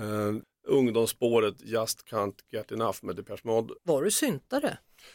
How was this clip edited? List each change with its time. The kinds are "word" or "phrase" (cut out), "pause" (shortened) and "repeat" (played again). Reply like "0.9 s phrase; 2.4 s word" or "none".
3.8 s pause